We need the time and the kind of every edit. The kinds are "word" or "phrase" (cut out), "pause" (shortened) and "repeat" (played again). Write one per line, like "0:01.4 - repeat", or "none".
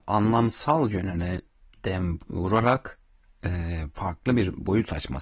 none